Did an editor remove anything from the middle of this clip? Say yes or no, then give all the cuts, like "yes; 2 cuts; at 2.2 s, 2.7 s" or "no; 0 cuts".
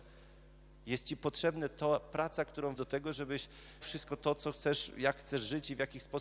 yes; 2 cuts; at 2.7 s, 3.8 s